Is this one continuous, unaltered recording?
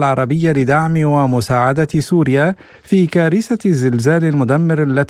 yes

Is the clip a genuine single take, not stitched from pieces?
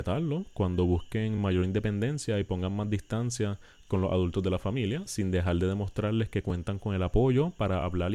yes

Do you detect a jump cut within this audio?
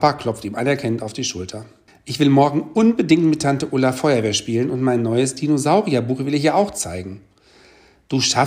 yes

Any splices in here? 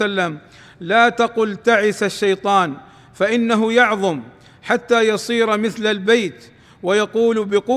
no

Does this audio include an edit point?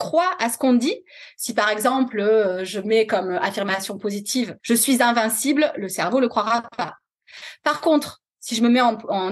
yes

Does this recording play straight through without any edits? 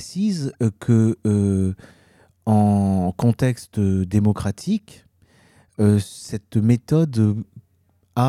yes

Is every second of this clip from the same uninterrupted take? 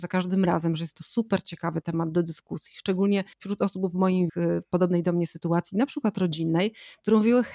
no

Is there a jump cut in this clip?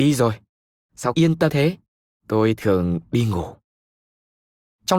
yes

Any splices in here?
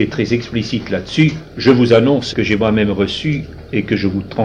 yes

